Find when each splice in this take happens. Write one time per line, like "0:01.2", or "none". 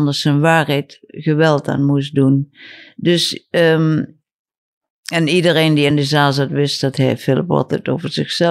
none